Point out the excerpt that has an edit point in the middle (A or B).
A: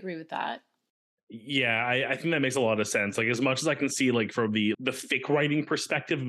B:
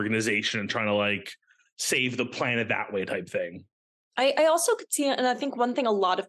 A